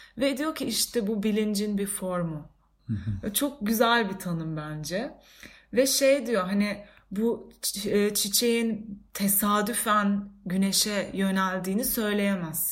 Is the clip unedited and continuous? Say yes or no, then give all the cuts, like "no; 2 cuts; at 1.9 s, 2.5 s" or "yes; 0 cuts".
yes; 0 cuts